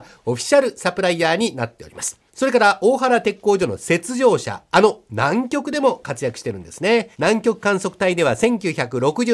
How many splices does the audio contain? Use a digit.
2